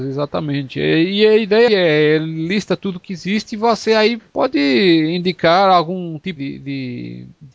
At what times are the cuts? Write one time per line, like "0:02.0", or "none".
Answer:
0:01.7
0:04.2
0:06.4